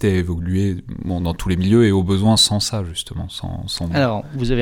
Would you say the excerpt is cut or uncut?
uncut